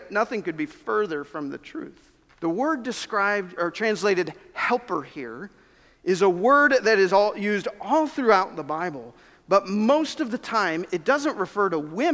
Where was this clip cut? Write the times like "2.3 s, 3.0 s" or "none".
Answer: 2.3 s, 3.6 s